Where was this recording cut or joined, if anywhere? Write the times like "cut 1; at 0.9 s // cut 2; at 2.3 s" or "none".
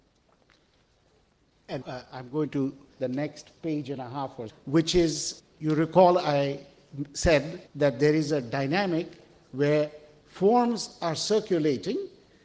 cut 1; at 1.8 s // cut 2; at 2.9 s // cut 3; at 4.5 s // cut 4; at 5.4 s // cut 5; at 7.7 s